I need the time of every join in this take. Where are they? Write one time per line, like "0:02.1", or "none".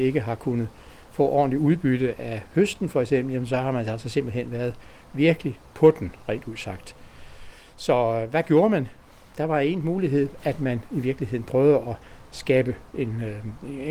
none